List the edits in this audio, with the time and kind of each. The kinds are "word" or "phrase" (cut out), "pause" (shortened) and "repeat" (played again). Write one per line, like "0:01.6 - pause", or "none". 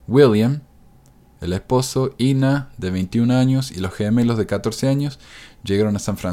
none